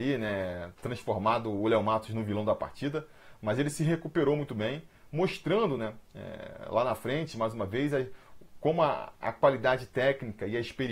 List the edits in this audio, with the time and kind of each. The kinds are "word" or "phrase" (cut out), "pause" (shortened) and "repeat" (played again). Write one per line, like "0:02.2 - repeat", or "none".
none